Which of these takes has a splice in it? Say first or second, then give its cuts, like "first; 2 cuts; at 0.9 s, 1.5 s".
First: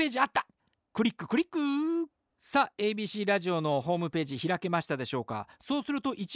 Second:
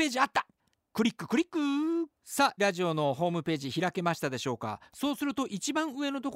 second; 2 cuts; at 2.2 s, 2.6 s